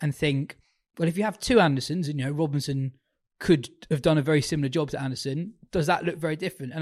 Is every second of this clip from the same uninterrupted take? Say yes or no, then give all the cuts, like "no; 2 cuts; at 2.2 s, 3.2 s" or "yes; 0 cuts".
yes; 0 cuts